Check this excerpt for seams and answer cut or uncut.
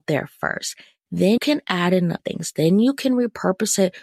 cut